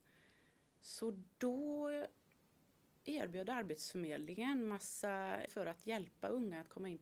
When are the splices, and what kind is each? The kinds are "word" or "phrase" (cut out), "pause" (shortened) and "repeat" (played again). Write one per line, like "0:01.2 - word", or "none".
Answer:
0:01.3 - pause
0:05.5 - word